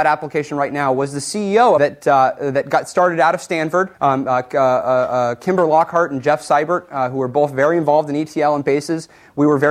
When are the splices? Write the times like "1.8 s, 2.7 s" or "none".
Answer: 1.8 s, 3.9 s